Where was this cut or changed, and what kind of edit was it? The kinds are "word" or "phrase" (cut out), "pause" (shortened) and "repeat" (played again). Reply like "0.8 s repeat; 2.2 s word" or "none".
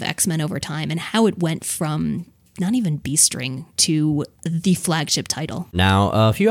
none